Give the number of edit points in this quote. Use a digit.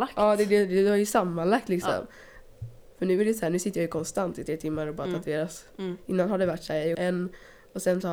1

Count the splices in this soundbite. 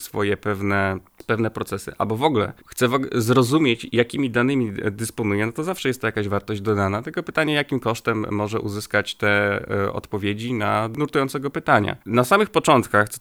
2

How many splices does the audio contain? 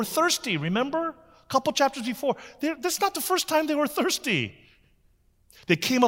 0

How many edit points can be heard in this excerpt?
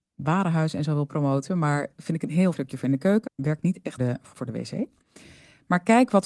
4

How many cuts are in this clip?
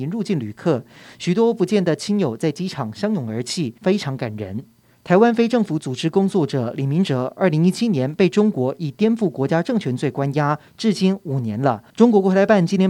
3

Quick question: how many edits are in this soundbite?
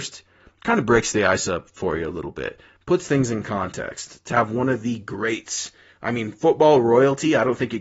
0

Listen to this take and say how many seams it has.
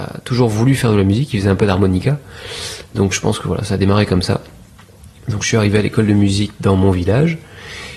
0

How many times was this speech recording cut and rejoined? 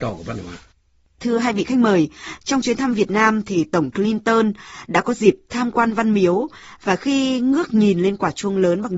1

